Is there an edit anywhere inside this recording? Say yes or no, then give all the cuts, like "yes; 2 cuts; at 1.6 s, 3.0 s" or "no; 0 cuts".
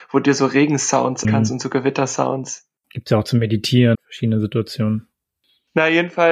yes; 2 cuts; at 1.2 s, 3.9 s